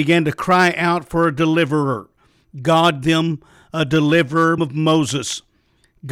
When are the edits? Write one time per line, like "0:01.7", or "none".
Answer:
0:03.0
0:04.6